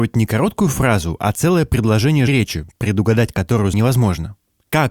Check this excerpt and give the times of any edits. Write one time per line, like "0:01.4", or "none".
0:02.3
0:03.7